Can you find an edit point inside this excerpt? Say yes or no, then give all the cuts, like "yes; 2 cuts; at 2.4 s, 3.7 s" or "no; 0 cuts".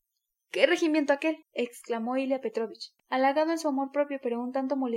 yes; 2 cuts; at 1.4 s, 3.0 s